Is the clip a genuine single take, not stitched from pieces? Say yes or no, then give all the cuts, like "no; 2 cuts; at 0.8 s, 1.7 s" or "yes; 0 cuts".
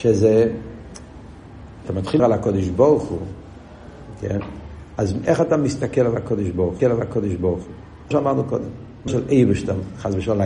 no; 5 cuts; at 1.8 s, 2.2 s, 6.8 s, 8.1 s, 9.1 s